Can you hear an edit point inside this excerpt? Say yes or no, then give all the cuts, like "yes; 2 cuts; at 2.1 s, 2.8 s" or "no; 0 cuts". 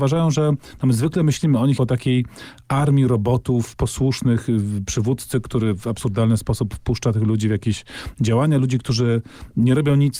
yes; 1 cut; at 1.8 s